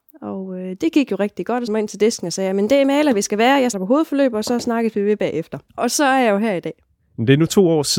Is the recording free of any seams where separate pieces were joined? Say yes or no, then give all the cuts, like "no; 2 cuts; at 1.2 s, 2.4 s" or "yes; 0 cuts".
no; 3 cuts; at 1.7 s, 3.7 s, 5.7 s